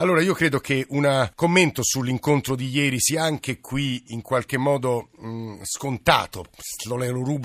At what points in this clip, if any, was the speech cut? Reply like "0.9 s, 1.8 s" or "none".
1.3 s